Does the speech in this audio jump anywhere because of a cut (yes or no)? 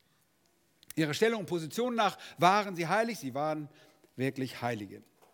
no